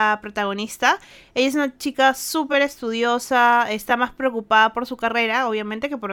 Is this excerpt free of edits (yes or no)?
yes